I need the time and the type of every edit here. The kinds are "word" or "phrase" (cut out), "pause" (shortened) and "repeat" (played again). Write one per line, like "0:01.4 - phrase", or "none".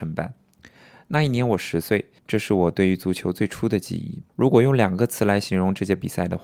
0:02.2 - pause
0:04.3 - pause